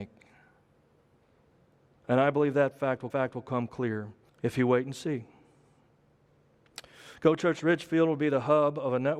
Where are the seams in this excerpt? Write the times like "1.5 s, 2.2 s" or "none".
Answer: 3.1 s, 4.3 s